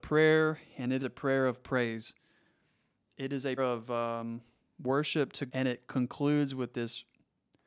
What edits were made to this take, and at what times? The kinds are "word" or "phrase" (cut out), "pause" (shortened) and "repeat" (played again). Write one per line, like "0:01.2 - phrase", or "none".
0:01.0 - word
0:03.6 - word
0:05.5 - word

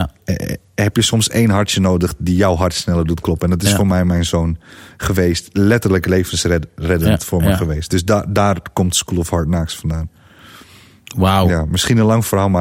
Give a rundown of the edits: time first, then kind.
none

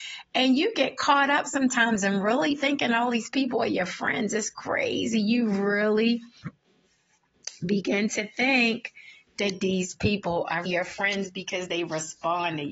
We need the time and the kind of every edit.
0:10.7 - word

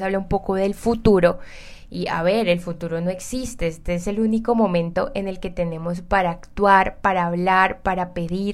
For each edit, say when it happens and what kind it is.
none

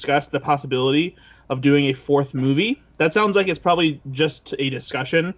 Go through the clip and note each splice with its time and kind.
none

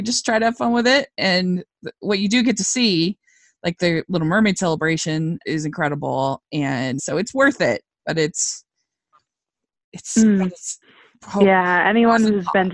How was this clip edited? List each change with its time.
0:05.4 - word
0:07.0 - word

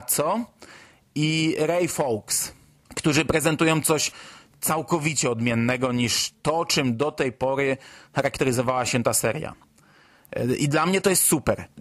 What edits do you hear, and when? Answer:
none

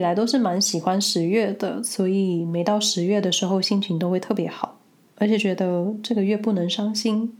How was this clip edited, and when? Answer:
none

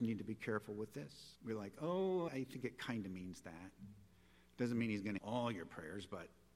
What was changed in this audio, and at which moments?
0:01.4 - pause
0:02.3 - word
0:05.2 - word

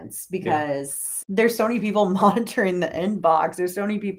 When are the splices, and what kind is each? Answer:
none

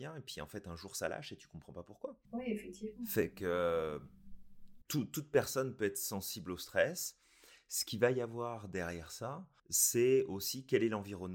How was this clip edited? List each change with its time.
0:02.2 - pause
0:09.6 - pause

